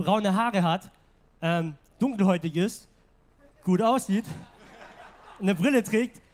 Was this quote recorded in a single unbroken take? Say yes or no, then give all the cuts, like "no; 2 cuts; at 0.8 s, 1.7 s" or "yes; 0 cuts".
yes; 0 cuts